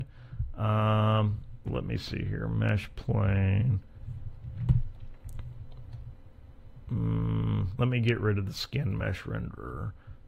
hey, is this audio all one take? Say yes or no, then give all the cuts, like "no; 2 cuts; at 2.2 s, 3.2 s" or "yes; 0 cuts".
no; 1 cut; at 1.6 s